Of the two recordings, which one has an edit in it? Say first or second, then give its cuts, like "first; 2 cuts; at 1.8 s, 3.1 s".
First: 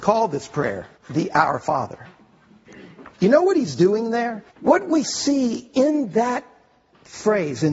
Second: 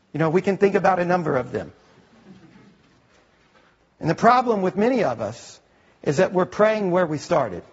first; 3 cuts; at 1.0 s, 3.1 s, 4.5 s